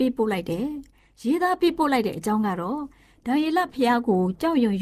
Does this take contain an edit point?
no; 0 cuts

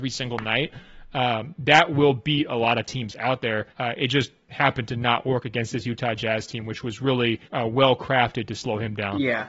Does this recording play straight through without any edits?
no; 2 cuts; at 3.7 s, 7.4 s

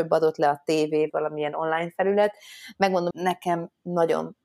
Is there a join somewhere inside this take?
yes; 2 cuts; at 1.1 s, 3.1 s

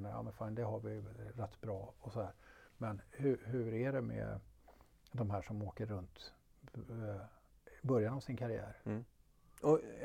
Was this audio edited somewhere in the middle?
no; 0 cuts

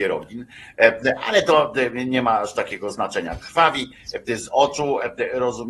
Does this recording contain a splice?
no; 0 cuts

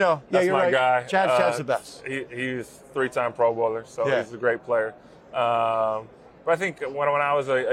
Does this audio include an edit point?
no; 0 cuts

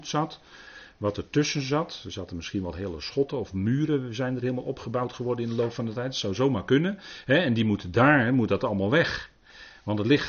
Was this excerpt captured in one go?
yes; 0 cuts

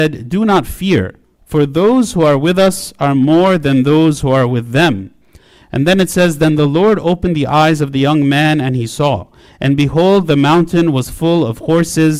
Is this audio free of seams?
yes; 0 cuts

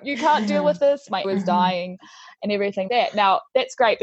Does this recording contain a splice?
yes; 2 cuts; at 1.2 s, 2.9 s

